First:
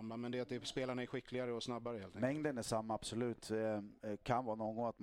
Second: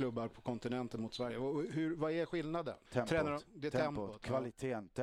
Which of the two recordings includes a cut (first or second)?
second